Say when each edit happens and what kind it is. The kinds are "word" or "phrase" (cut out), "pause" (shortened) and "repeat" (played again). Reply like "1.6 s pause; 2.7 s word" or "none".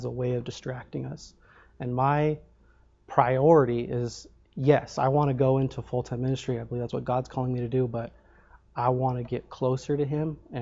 none